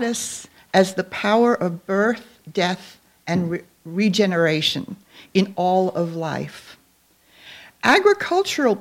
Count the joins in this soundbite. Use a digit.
0